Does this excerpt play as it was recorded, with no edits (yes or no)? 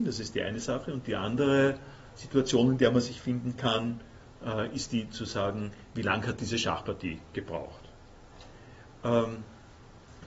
yes